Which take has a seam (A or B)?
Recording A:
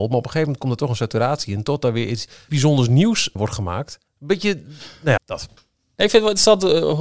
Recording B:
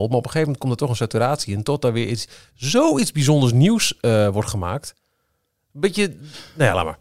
A